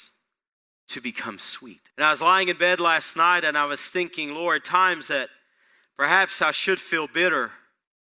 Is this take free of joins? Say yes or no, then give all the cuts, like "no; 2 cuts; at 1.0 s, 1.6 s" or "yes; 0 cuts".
no; 1 cut; at 1.9 s